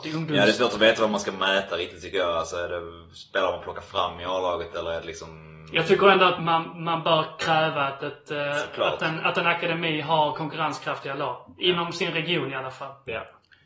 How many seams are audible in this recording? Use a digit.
1